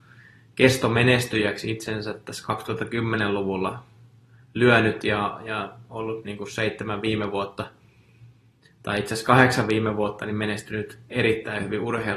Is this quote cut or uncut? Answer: uncut